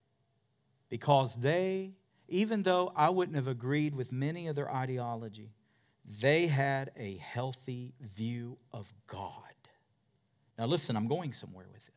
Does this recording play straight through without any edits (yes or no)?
yes